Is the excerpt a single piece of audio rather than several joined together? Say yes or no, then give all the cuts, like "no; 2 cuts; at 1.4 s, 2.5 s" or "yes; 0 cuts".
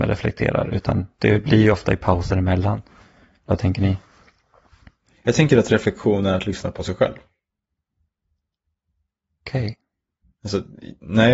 yes; 0 cuts